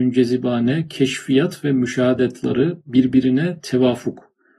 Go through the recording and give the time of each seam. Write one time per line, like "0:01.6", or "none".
none